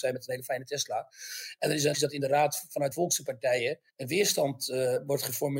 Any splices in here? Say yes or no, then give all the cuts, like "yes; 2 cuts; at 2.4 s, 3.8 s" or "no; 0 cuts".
yes; 3 cuts; at 1.9 s, 2.9 s, 3.9 s